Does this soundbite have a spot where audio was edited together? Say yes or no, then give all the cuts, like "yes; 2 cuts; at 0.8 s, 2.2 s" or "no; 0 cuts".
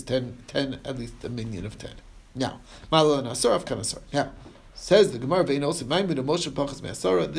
no; 0 cuts